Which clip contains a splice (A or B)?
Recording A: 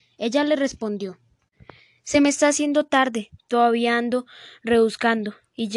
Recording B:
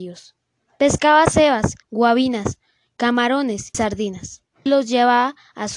B